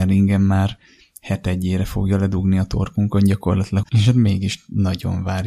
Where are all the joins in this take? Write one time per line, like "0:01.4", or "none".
0:03.8